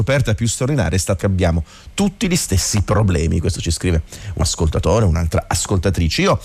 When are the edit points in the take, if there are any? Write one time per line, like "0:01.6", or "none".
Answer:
0:01.2
0:04.4